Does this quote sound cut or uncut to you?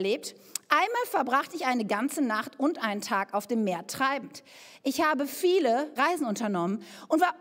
cut